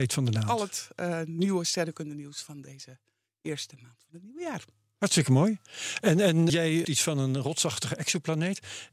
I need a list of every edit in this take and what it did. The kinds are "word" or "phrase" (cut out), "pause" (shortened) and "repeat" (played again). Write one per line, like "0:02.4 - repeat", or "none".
0:06.5 - word
0:06.8 - word